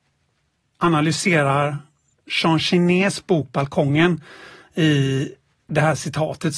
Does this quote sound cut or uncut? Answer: uncut